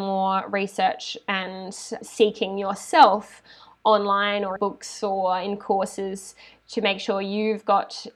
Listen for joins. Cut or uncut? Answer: cut